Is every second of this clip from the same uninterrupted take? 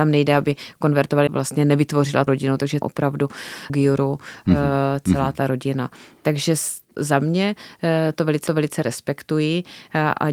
no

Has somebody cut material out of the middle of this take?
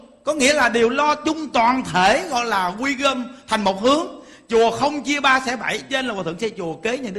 no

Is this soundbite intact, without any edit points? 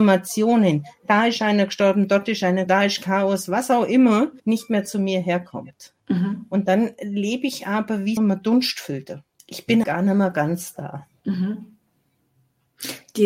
no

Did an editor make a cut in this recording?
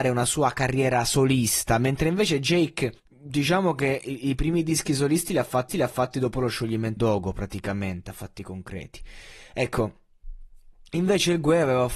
yes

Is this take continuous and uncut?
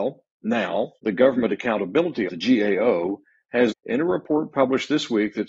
no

